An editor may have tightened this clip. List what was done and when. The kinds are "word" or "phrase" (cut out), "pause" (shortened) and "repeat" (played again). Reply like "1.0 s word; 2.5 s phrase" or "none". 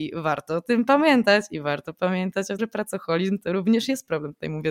2.6 s word